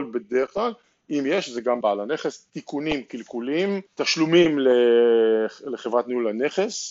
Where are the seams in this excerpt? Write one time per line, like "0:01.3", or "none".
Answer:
0:01.8
0:03.9